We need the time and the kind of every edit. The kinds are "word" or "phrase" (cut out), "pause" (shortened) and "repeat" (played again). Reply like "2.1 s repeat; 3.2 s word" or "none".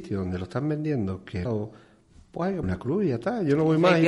1.4 s phrase; 2.6 s word